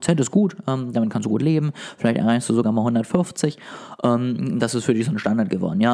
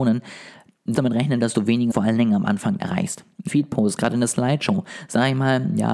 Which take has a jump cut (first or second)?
second